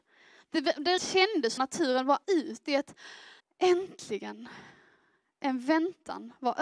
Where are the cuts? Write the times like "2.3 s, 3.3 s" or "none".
1.0 s, 1.6 s, 2.2 s, 3.4 s